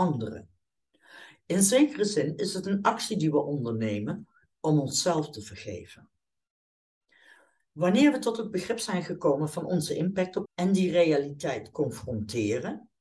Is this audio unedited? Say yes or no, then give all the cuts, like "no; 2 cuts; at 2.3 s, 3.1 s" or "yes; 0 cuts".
no; 1 cut; at 10.4 s